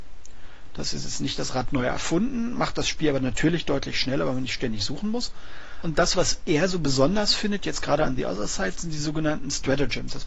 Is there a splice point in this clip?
no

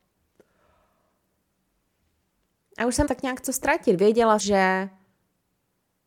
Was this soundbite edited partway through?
yes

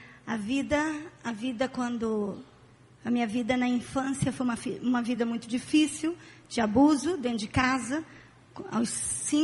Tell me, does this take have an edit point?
no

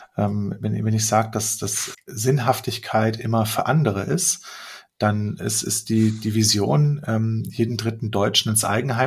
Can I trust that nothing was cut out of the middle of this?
no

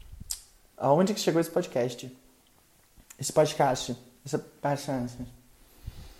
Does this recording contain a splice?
no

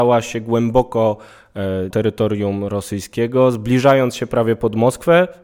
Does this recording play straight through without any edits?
no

